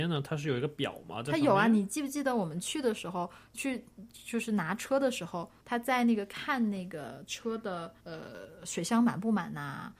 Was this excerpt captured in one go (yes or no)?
no